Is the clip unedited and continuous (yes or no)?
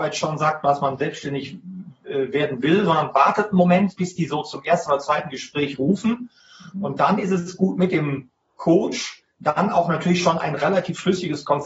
yes